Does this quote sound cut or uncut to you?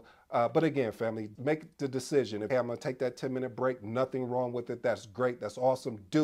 cut